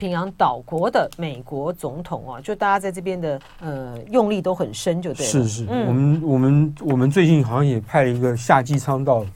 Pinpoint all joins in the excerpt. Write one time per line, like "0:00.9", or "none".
0:03.5